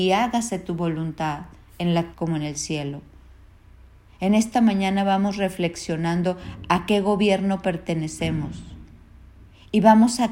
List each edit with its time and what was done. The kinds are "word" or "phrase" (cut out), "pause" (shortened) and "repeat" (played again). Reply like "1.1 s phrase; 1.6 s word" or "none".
2.1 s word